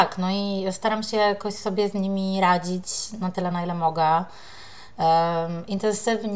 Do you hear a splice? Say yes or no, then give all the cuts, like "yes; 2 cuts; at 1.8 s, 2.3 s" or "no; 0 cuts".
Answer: no; 0 cuts